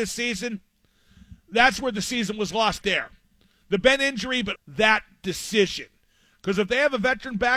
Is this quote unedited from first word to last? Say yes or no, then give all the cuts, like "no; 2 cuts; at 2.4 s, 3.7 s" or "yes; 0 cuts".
no; 2 cuts; at 2.8 s, 4.6 s